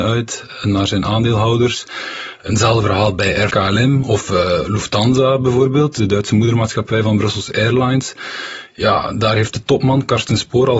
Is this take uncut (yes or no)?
no